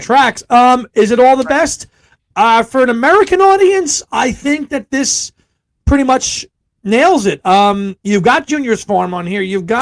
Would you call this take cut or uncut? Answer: cut